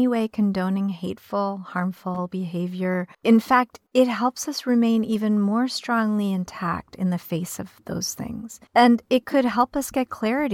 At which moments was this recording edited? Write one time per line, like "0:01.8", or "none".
0:03.1
0:03.9
0:08.7

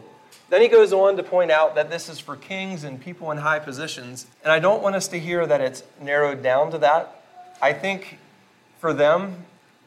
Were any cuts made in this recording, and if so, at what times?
0:04.3

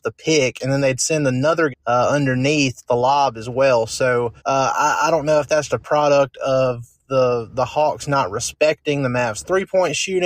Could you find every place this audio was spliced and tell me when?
0:01.7
0:02.9
0:04.4
0:05.7

